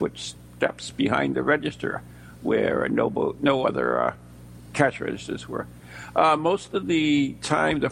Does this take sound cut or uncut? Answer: uncut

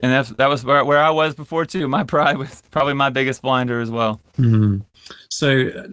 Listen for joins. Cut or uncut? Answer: cut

